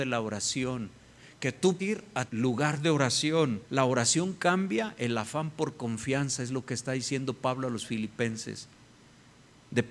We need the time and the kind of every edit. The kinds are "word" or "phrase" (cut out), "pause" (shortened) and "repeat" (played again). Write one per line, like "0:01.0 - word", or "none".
0:01.8 - word
0:02.3 - word
0:03.6 - pause